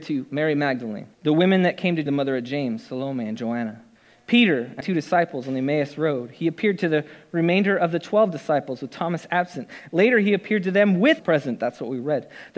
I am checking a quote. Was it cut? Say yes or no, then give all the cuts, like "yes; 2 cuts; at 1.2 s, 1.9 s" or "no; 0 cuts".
yes; 5 cuts; at 1.1 s, 2.1 s, 4.0 s, 4.8 s, 11.2 s